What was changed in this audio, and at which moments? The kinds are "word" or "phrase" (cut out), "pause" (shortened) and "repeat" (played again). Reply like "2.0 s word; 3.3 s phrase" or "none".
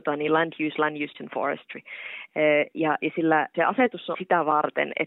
1.1 s word; 3.5 s word; 4.1 s word